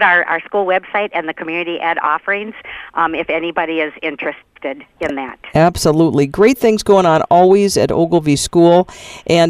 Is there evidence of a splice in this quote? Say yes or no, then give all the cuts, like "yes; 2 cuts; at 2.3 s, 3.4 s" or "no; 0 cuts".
no; 0 cuts